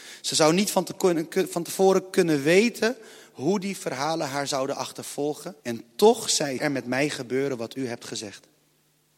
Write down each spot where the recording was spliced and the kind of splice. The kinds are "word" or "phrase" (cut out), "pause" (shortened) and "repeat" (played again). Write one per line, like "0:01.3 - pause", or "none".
0:05.6 - pause
0:06.6 - phrase